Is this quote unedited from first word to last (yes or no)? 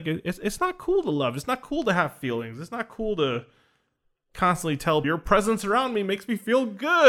no